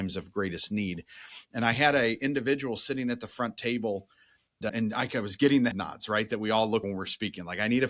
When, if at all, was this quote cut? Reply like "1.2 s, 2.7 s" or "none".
4.6 s, 5.7 s, 6.8 s